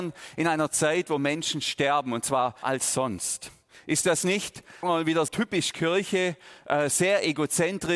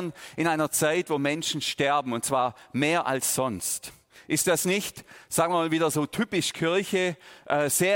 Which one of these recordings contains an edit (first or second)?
first